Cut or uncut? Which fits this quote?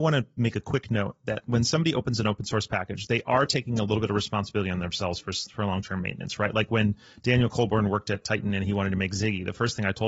uncut